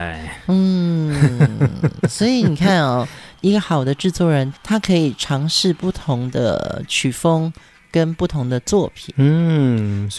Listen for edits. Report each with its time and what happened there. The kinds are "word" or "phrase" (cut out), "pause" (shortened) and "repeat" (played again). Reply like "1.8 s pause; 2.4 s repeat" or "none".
4.6 s pause